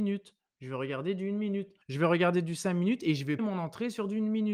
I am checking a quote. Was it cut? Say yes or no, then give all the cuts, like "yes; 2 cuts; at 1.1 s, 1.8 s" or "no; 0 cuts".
yes; 2 cuts; at 1.8 s, 3.4 s